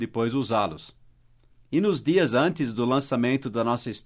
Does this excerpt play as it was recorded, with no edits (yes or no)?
yes